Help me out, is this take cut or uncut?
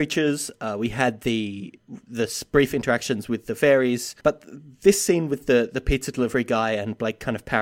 cut